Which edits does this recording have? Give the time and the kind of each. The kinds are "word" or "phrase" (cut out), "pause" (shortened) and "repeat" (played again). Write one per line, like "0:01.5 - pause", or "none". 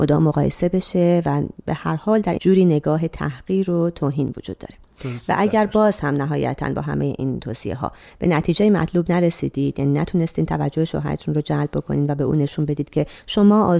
0:02.4 - word